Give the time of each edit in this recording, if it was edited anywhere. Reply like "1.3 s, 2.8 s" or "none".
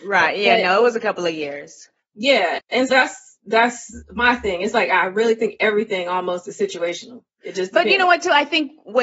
2.9 s, 7.3 s